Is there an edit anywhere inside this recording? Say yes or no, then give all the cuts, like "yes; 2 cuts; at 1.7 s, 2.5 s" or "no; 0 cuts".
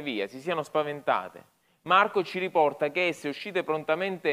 no; 0 cuts